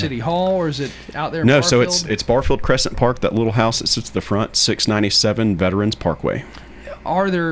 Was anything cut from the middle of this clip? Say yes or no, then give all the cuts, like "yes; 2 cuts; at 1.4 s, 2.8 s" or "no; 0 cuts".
no; 0 cuts